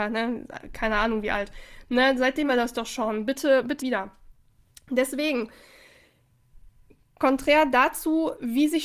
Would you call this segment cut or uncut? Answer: cut